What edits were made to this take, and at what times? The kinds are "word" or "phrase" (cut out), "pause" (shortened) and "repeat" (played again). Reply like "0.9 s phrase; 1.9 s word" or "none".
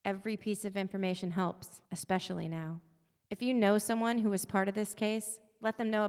1.9 s pause; 3.2 s pause